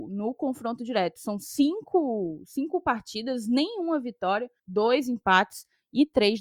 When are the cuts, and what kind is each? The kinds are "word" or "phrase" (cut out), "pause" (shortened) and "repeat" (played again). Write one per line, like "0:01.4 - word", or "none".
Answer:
0:04.6 - pause